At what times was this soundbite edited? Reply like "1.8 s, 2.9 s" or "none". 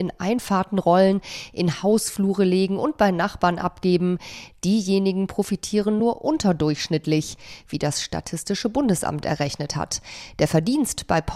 none